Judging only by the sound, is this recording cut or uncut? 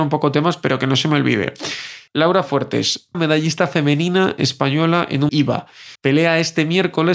cut